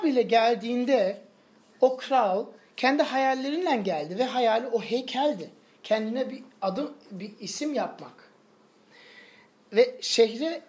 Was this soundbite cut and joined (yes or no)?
no